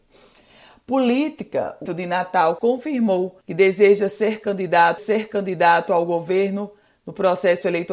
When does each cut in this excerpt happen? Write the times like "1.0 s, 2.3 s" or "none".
1.9 s, 2.6 s, 3.4 s, 5.0 s